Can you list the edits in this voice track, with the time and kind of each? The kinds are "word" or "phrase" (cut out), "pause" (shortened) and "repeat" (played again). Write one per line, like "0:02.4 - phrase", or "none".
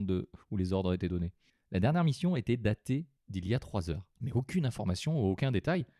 0:01.5 - pause
0:03.2 - pause
0:04.2 - pause